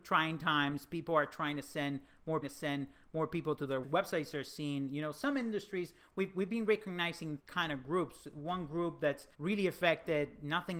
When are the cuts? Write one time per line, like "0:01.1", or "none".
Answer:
0:02.4
0:03.8
0:07.4
0:09.3